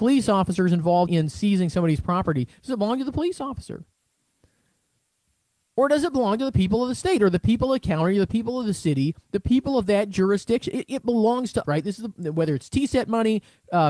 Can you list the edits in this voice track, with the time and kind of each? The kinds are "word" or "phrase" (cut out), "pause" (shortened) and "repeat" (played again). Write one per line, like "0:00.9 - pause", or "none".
0:01.1 - word
0:11.6 - word